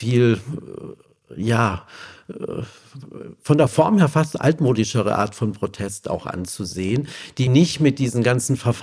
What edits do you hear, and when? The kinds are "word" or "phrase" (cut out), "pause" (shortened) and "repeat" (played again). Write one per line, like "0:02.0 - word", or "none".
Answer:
0:07.5 - word